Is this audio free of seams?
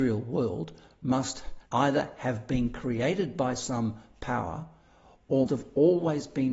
no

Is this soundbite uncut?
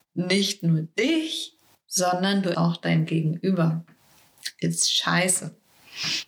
no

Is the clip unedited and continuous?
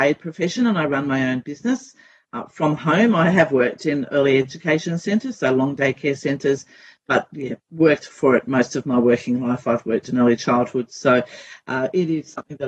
yes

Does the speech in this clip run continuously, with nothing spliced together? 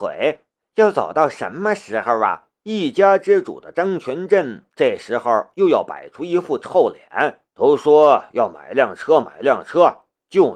no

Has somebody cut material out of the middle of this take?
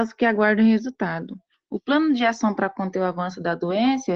no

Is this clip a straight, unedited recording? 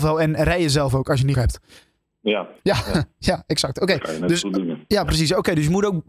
no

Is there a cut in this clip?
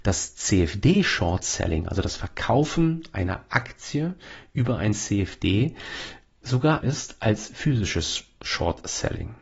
yes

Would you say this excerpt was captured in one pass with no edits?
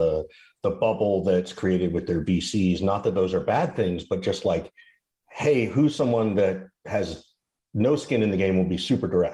yes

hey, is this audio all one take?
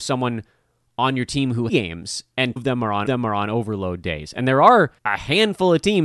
no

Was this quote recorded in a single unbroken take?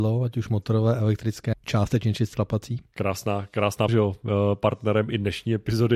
no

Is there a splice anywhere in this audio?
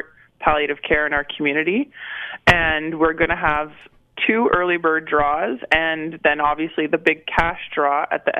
no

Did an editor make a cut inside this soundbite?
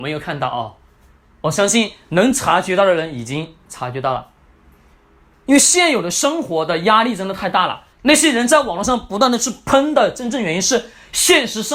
yes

